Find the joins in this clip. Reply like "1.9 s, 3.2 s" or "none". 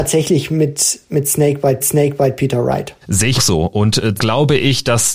1.8 s, 3.0 s, 3.4 s, 4.2 s